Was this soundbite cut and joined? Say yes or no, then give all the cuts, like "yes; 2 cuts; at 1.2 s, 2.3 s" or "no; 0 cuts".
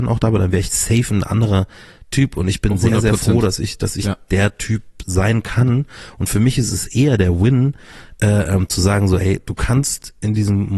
no; 0 cuts